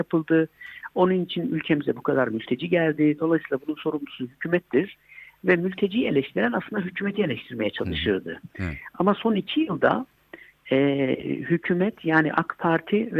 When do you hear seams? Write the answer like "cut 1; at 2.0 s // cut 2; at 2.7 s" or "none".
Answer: none